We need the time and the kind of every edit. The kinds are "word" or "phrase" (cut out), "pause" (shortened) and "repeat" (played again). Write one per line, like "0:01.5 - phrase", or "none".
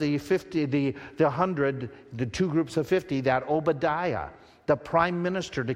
none